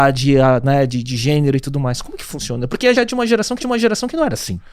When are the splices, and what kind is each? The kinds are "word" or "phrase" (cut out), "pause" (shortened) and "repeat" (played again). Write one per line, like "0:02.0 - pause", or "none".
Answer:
0:02.9 - word
0:03.6 - repeat